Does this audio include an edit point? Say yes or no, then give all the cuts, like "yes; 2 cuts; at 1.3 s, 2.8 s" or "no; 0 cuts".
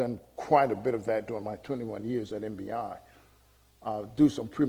no; 0 cuts